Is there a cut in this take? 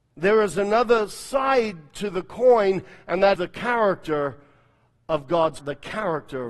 yes; 2 cuts; at 3.4 s, 5.6 s

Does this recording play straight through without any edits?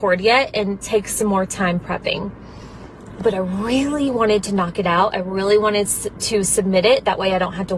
yes; 0 cuts

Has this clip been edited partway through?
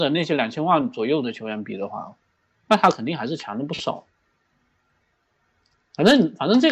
no; 0 cuts

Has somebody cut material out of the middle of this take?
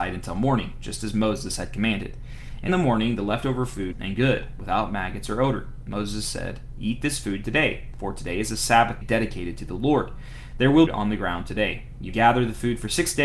yes; 5 cuts; at 2.7 s, 3.9 s, 9.0 s, 10.9 s, 12.1 s

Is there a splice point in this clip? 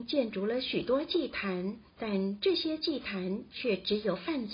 yes; 1 cut; at 1.9 s

